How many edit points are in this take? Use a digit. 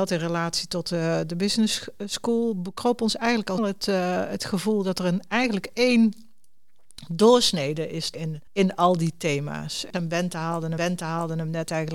4